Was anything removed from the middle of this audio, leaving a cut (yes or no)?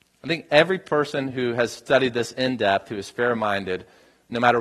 no